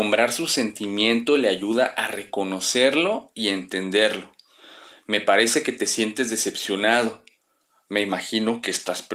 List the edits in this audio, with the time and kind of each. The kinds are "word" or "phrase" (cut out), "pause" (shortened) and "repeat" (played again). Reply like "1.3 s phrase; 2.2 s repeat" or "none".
none

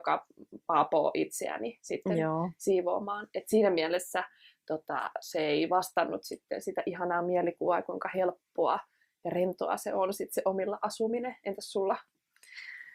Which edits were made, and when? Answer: none

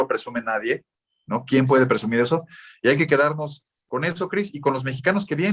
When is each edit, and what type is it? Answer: none

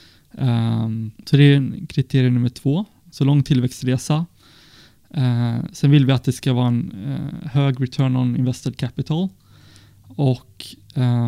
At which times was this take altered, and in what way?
1.1 s pause

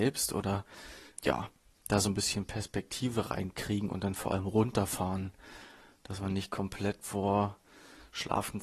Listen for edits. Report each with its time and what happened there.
1.2 s word; 7.0 s word

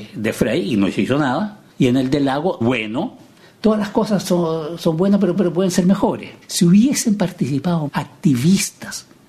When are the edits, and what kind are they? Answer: 1.7 s pause; 2.6 s phrase; 4.2 s word; 5.4 s repeat; 6.4 s pause; 7.9 s word

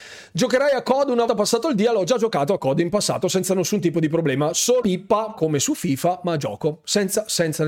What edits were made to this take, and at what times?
1.3 s word; 4.8 s word

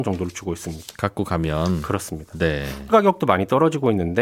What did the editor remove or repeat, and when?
2.9 s word

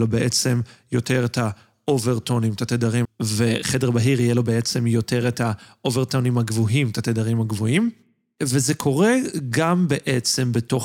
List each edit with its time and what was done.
3.0 s word

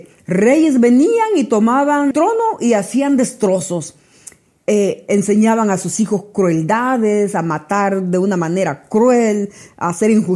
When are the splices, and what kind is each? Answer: 2.1 s word

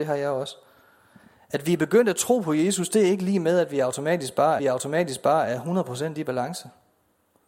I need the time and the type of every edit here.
4.6 s repeat

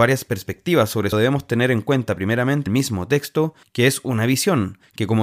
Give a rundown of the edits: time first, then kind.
1.1 s phrase; 2.7 s phrase

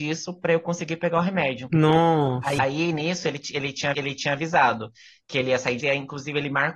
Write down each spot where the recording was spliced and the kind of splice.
2.6 s word; 3.9 s repeat; 5.8 s phrase

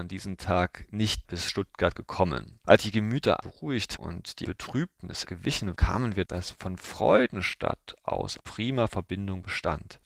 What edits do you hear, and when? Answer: 1.2 s word; 2.8 s word; 3.4 s word; 4.0 s word; 4.4 s word; 5.2 s word; 5.7 s word; 6.2 s word; 8.4 s word

